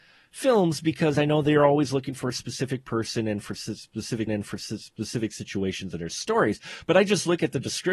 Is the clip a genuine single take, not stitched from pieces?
no; 1 cut; at 4.3 s

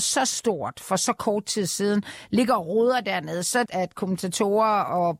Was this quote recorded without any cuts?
no; 1 cut; at 3.6 s

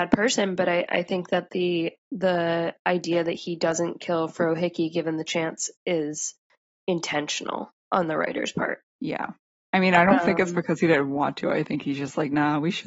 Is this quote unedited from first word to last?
no; 3 cuts; at 2.0 s, 6.7 s, 8.9 s

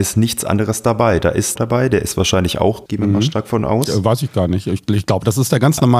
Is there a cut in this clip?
yes; 2 cuts; at 1.6 s, 2.9 s

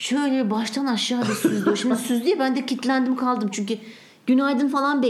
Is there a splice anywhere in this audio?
no; 0 cuts

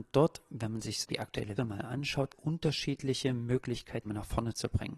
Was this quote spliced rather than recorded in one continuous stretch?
yes; 4 cuts; at 1.0 s, 1.6 s, 2.3 s, 4.1 s

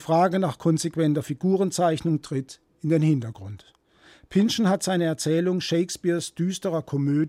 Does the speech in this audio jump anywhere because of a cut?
no; 0 cuts

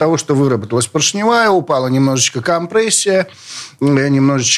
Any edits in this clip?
no; 0 cuts

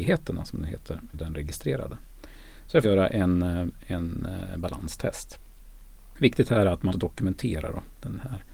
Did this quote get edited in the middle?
yes; 3 cuts; at 1.1 s, 2.8 s, 6.9 s

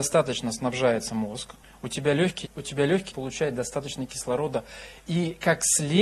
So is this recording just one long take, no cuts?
no; 3 cuts; at 1.6 s, 2.4 s, 3.1 s

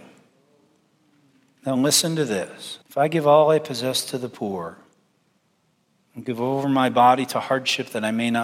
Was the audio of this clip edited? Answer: yes; 1 cut; at 2.8 s

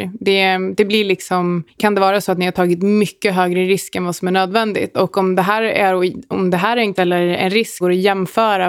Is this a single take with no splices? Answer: no; 3 cuts; at 1.8 s, 7.0 s, 7.8 s

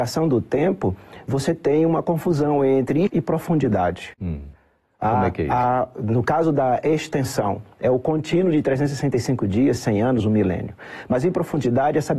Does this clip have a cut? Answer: yes; 1 cut; at 3.1 s

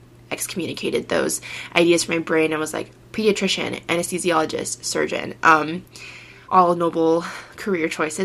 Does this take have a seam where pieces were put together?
yes; 1 cut; at 6.4 s

